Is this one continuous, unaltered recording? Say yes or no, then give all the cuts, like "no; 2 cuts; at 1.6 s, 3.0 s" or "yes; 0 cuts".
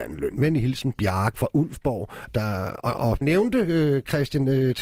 no; 3 cuts; at 1.3 s, 2.3 s, 3.2 s